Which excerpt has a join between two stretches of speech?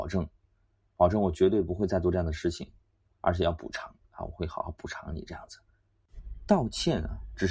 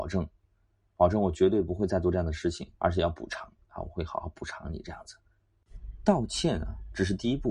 second; 1 cut; at 2.7 s

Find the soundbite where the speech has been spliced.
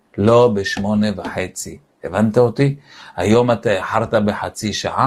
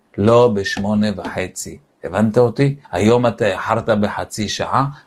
second; 1 cut; at 2.8 s

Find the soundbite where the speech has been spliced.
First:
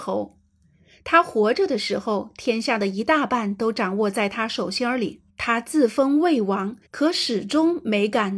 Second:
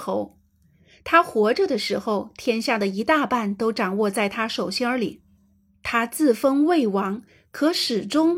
first; 2 cuts; at 5.3 s, 6.9 s

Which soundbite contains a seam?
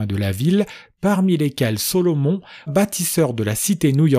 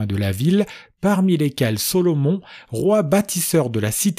first; 1 cut; at 2.7 s

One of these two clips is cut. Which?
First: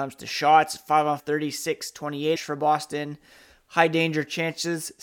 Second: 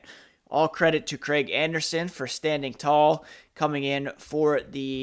first; 2 cuts; at 1.2 s, 2.4 s

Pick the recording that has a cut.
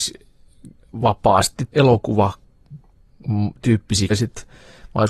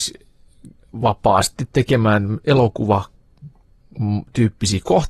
first; 2 cuts; at 1.7 s, 4.1 s

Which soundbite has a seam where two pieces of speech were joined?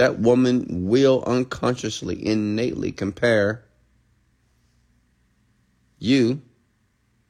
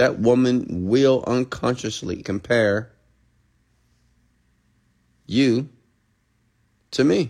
second; 1 cut; at 2.2 s

